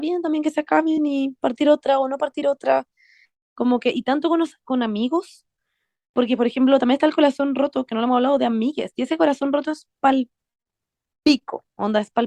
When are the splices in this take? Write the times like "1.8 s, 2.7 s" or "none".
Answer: none